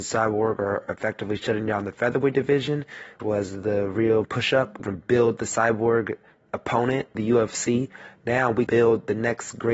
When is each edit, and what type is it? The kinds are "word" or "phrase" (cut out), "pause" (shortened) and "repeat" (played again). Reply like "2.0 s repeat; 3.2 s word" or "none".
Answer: 3.2 s word; 4.2 s word; 4.9 s word; 7.1 s word; 8.7 s word